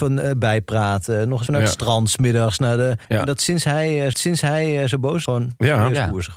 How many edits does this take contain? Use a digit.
4